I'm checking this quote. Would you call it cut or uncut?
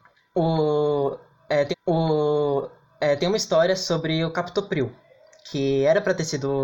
cut